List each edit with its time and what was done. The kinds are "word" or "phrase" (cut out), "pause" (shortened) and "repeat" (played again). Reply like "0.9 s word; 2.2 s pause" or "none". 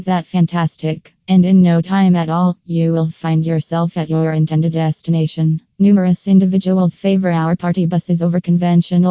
1.2 s pause; 5.7 s pause

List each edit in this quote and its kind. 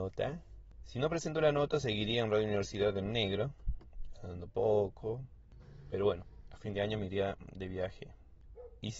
none

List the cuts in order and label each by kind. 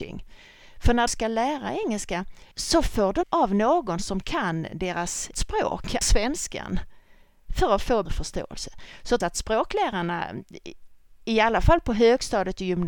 1.1 s word; 2.5 s pause; 3.2 s phrase; 5.3 s word; 6.0 s word; 8.1 s word; 9.2 s word

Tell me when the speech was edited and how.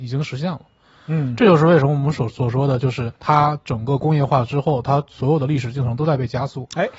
3.2 s pause

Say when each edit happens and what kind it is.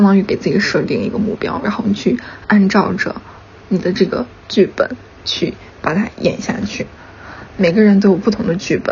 none

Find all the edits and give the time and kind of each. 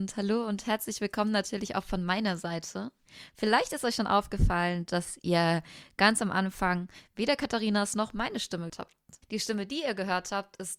8.7 s word; 9.2 s pause

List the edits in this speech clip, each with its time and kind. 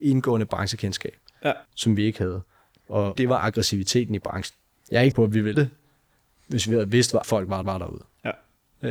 1.7 s pause; 3.2 s phrase; 4.8 s pause; 5.1 s word; 5.5 s phrase; 7.2 s word; 7.6 s repeat

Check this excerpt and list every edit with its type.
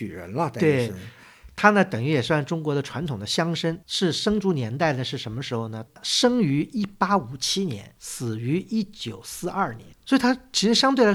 3.8 s pause; 9.9 s pause

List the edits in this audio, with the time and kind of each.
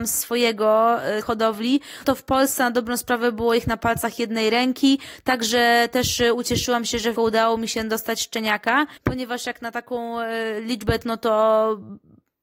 1.2 s word; 2.0 s word; 7.2 s phrase; 9.0 s pause; 11.0 s word

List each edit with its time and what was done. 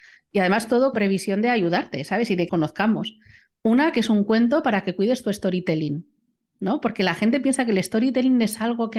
0.9 s word; 2.5 s word

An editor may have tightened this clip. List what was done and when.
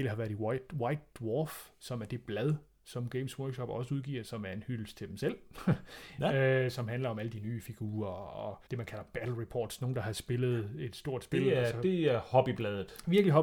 8.7 s pause

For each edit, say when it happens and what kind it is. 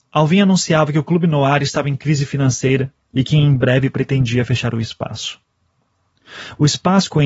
none

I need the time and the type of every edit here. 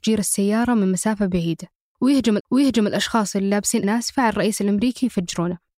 2.4 s repeat; 3.8 s word

